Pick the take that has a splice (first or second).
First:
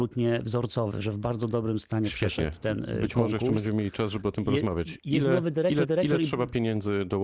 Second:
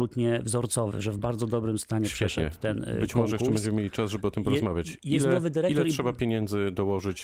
first